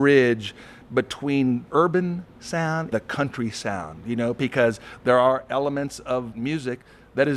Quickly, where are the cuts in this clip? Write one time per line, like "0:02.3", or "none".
0:01.7
0:02.9
0:06.3